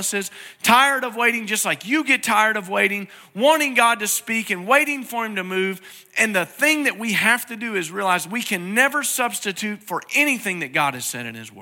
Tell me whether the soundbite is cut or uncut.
uncut